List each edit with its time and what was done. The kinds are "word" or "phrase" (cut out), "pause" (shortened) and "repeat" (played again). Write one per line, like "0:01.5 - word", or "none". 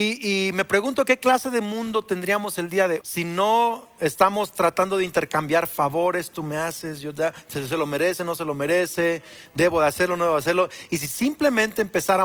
0:03.0 - word